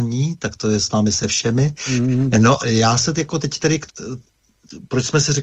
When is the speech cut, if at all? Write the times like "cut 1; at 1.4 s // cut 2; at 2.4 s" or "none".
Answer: cut 1; at 2.6 s // cut 2; at 3.1 s // cut 3; at 3.9 s